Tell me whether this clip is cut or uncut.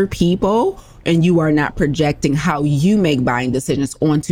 uncut